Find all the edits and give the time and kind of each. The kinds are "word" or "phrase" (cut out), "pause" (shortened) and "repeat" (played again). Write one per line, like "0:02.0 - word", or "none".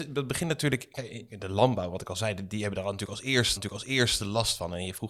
0:03.6 - repeat